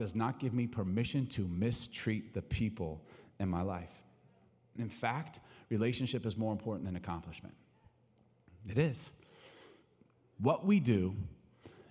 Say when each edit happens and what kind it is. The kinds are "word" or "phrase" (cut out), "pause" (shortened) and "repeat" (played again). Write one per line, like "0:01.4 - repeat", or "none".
none